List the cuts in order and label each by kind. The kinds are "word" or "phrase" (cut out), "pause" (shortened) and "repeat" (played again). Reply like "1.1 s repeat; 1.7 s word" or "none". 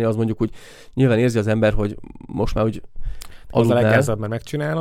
none